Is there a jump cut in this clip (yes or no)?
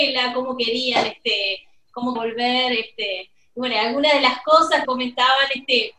yes